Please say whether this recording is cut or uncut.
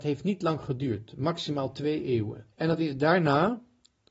cut